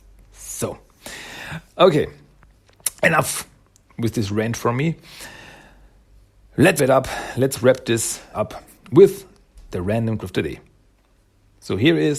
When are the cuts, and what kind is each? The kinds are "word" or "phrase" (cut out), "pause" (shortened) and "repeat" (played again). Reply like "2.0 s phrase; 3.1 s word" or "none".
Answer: 1.7 s word; 6.8 s word; 8.3 s word; 10.2 s word